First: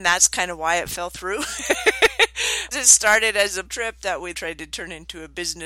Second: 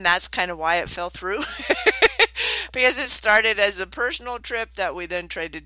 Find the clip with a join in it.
first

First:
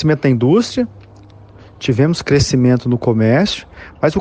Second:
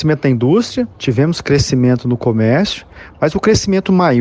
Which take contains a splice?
second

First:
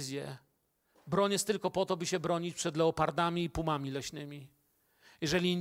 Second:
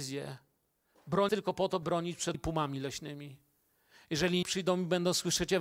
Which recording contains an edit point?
second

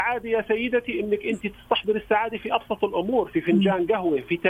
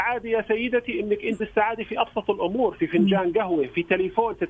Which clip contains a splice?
second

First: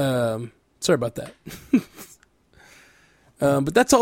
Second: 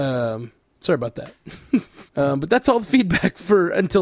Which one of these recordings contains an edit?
second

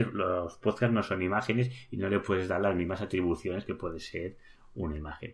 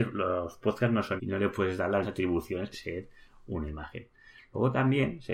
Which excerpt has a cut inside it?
second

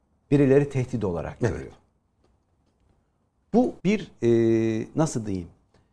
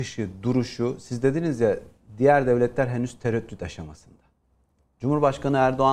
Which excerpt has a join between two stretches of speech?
first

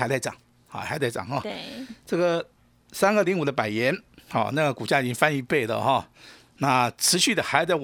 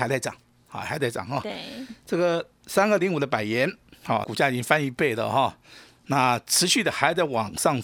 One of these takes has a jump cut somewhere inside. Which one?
second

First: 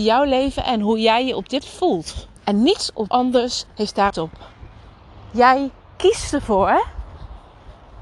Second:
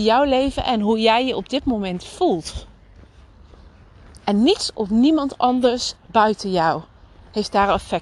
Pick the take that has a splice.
first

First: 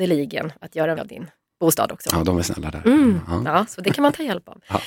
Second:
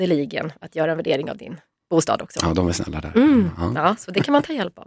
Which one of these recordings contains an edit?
first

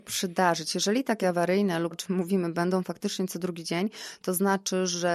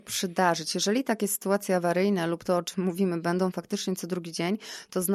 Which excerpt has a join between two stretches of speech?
first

